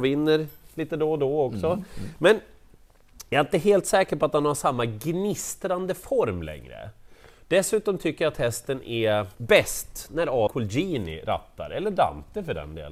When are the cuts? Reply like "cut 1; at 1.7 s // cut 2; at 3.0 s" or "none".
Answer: cut 1; at 9.3 s // cut 2; at 10.5 s